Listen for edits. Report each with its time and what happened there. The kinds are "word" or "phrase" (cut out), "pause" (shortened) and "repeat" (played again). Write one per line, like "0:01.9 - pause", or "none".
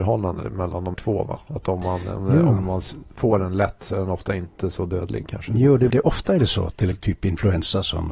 0:00.9 - word
0:05.9 - word
0:06.9 - word